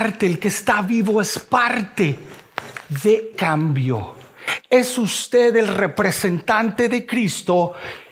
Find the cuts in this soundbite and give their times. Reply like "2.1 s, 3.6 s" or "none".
3.3 s